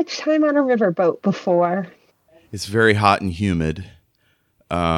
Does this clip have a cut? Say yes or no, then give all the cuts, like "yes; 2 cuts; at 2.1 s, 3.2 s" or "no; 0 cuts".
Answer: yes; 1 cut; at 2.3 s